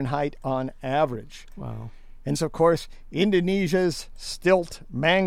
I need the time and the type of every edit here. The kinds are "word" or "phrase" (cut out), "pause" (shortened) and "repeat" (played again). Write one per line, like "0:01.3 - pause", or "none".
0:02.3 - phrase